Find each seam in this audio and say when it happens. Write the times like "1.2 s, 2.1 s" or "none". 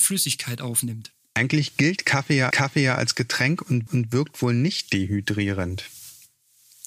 2.5 s, 3.9 s